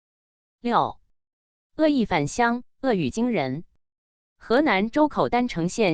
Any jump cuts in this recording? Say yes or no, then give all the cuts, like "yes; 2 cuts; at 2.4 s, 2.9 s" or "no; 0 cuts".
no; 0 cuts